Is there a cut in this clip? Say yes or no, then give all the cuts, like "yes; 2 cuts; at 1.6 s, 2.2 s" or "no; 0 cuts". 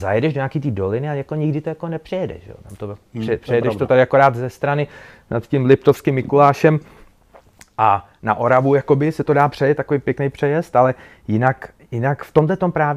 no; 0 cuts